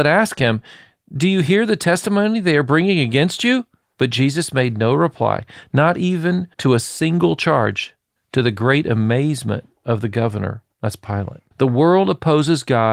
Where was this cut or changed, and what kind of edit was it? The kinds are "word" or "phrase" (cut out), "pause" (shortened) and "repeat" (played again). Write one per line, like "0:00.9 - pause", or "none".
0:03.8 - pause
0:06.5 - pause
0:08.2 - pause
0:10.7 - pause
0:11.5 - pause